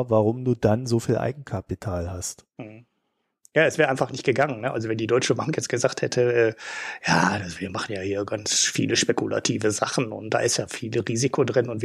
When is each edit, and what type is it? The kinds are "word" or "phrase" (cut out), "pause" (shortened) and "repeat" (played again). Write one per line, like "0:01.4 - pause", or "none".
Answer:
none